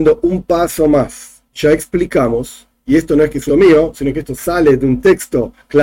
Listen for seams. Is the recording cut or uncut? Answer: cut